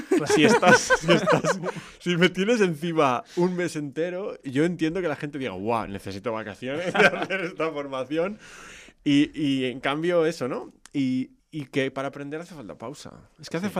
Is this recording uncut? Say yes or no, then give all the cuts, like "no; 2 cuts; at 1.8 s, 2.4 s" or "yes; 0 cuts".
no; 2 cuts; at 6.9 s, 11.4 s